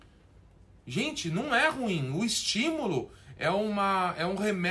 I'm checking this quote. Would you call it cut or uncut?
uncut